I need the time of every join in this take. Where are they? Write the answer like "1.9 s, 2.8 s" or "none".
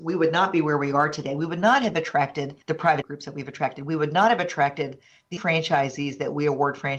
2.6 s, 3.0 s, 5.4 s